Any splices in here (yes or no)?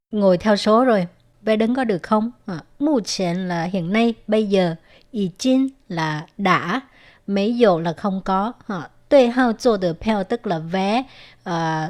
no